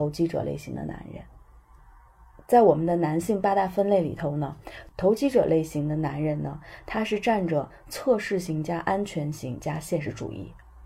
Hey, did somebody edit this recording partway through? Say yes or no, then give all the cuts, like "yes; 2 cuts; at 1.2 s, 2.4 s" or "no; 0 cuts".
no; 0 cuts